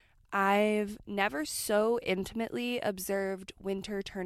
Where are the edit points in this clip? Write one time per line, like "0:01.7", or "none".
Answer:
none